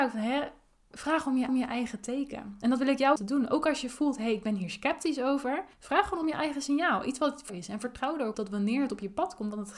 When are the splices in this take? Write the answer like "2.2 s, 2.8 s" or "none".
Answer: 1.5 s, 3.2 s, 5.7 s, 7.5 s, 8.3 s